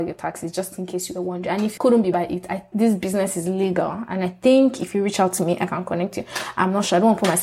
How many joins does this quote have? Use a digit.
3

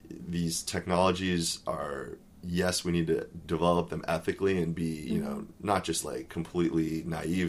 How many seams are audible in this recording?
1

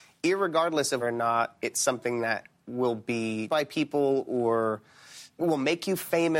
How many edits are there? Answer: 2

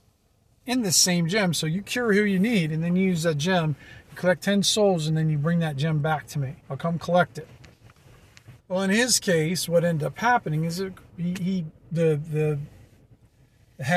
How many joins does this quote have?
2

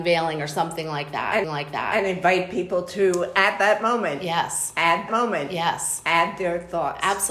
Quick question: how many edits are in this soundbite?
2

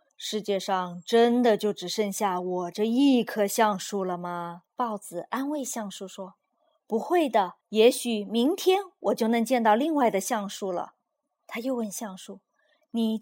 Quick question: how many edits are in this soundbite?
3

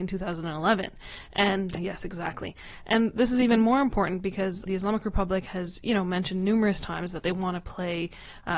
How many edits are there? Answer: 2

